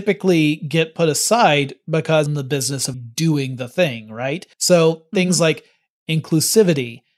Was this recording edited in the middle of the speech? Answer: yes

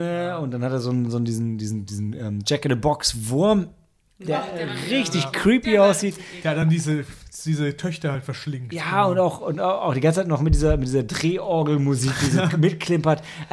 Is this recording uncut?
yes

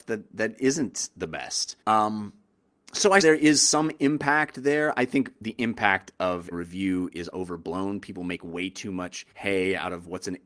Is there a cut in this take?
yes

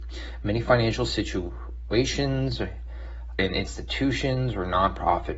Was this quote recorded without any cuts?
no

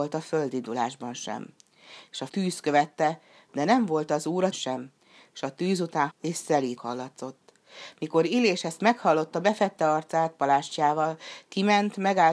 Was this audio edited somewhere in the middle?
yes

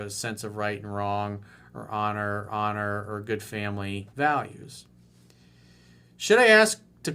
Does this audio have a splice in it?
yes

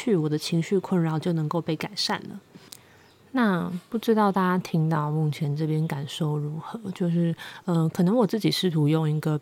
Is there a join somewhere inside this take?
no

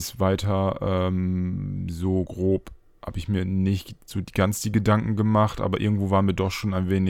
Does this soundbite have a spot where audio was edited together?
no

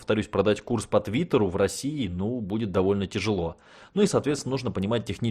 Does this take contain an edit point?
no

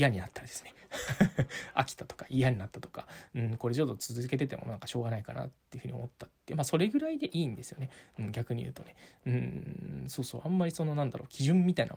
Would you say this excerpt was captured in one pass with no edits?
yes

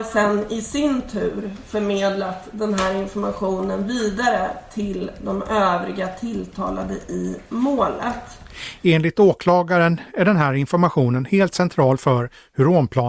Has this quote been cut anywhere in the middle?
no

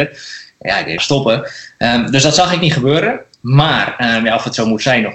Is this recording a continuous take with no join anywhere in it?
no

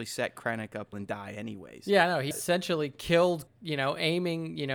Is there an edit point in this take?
yes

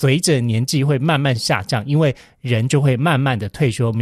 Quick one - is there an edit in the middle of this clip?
no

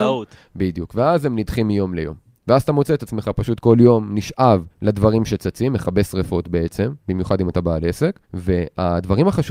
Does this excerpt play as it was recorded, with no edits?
no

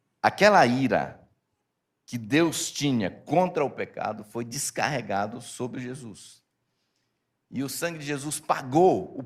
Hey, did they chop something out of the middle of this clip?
no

